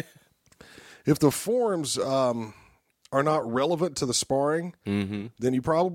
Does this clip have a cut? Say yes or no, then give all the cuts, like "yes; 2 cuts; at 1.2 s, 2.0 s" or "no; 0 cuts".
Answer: no; 0 cuts